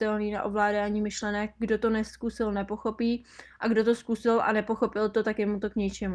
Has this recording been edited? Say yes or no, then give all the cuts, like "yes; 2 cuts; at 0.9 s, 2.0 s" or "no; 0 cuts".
no; 0 cuts